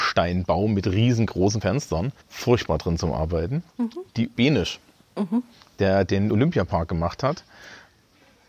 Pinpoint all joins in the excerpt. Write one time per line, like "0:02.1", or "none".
0:01.6
0:02.2
0:04.3
0:04.9